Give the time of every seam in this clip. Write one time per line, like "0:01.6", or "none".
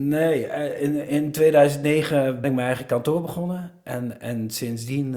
0:02.4